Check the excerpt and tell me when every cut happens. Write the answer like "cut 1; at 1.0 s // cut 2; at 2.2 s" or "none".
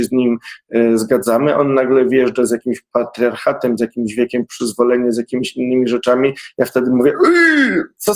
none